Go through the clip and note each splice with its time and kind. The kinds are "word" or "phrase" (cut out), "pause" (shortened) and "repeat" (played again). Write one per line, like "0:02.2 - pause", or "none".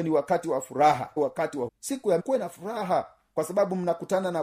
0:01.2 - word
0:01.7 - word
0:02.2 - phrase